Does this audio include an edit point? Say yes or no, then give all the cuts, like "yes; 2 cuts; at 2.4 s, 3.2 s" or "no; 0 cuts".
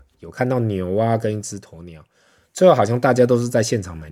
no; 0 cuts